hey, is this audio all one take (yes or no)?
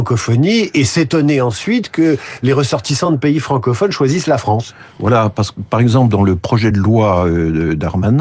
yes